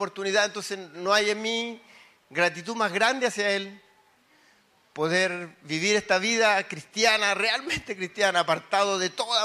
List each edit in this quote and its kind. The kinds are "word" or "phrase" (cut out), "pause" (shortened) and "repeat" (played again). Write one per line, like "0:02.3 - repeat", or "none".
none